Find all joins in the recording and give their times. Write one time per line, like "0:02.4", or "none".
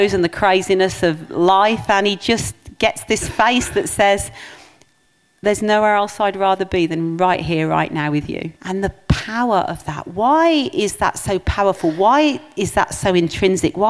0:08.6